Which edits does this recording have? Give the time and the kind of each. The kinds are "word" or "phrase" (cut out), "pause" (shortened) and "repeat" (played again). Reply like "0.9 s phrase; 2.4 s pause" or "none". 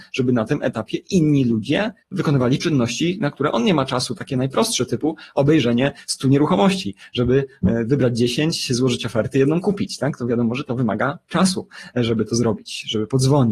2.0 s pause